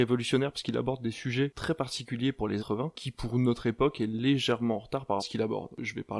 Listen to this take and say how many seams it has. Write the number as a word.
three